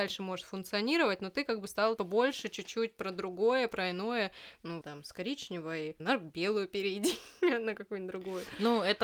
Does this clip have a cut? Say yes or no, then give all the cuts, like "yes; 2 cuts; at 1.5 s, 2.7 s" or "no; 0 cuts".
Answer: yes; 3 cuts; at 2.0 s, 4.8 s, 6.0 s